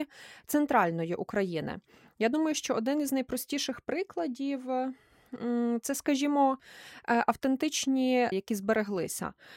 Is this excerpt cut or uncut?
cut